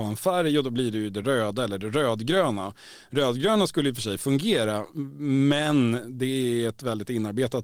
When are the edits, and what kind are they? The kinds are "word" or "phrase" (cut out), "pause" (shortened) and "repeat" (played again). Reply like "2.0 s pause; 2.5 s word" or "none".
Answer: none